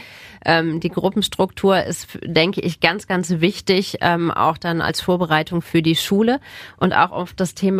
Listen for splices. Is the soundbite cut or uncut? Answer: uncut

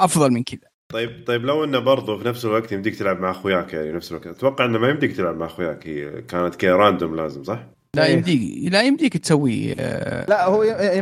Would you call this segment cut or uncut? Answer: uncut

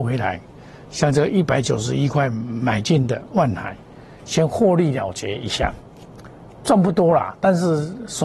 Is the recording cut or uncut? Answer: uncut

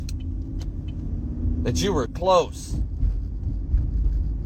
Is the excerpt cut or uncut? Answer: cut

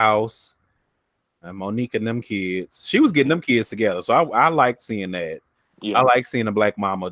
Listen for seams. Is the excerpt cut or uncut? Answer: uncut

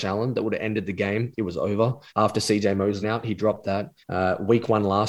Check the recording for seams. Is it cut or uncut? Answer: cut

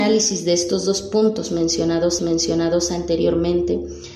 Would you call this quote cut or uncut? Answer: cut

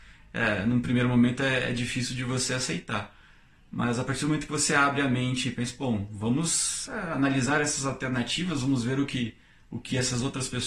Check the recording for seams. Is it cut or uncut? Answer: uncut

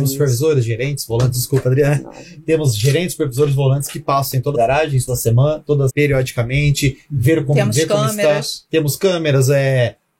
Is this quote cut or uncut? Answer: cut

